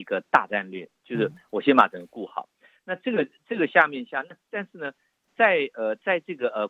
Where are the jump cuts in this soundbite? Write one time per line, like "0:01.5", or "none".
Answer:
0:05.3